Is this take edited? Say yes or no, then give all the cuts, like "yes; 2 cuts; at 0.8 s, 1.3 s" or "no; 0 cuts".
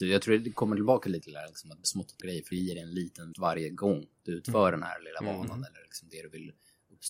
yes; 5 cuts; at 1.2 s, 1.8 s, 2.2 s, 2.5 s, 3.3 s